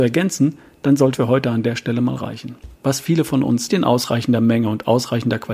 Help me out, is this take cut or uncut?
cut